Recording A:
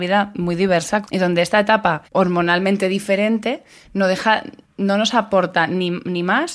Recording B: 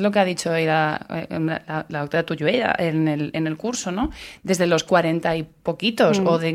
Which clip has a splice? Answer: A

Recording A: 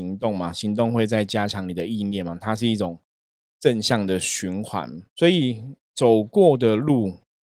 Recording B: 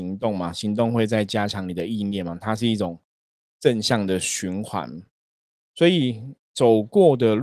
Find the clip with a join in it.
A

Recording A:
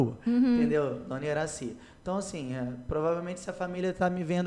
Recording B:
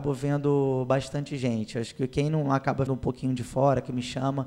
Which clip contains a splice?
B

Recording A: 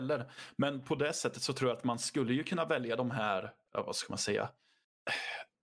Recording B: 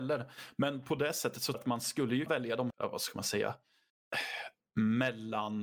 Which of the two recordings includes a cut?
B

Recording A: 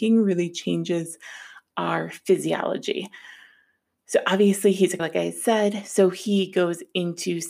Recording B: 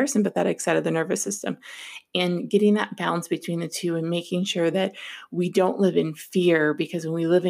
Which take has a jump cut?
A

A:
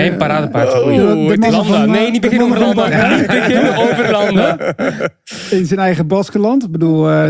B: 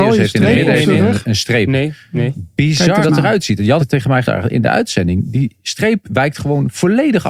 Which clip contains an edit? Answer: B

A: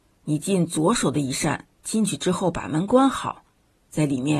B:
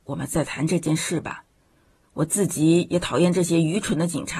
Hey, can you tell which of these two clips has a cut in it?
A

